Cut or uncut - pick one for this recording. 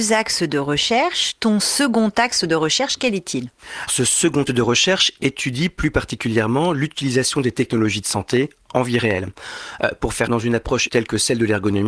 cut